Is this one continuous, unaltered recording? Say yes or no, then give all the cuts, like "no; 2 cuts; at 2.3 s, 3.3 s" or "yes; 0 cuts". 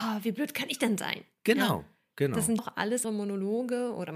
no; 2 cuts; at 2.6 s, 3.0 s